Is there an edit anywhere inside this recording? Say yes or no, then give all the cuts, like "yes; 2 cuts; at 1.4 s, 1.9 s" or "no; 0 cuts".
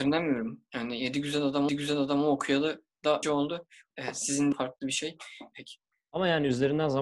yes; 5 cuts; at 1.7 s, 3.2 s, 3.9 s, 4.5 s, 5.5 s